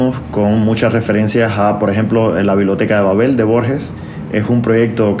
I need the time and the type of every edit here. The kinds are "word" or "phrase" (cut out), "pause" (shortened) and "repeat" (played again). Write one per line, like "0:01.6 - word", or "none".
none